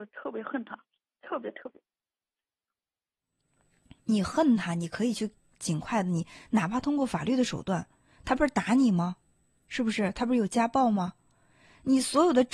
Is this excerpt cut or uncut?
uncut